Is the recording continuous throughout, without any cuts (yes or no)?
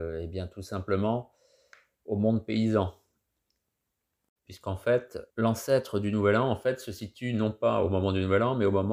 no